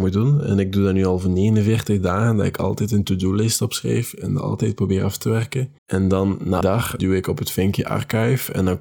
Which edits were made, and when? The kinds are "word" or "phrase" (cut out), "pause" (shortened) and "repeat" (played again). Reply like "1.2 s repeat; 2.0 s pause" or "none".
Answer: 5.8 s pause; 6.6 s word; 7.0 s word